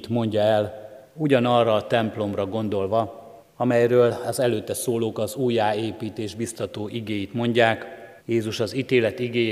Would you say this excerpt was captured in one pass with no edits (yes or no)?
no